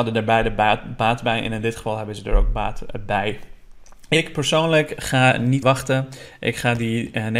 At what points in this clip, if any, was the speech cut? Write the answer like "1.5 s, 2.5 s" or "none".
5.6 s